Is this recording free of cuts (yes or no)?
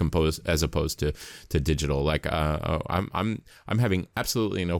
yes